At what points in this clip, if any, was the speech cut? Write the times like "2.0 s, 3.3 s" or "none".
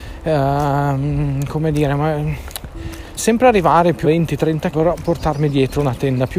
3.2 s, 4.0 s, 4.7 s, 5.0 s